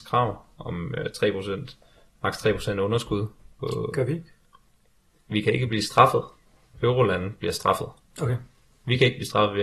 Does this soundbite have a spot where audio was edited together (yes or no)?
no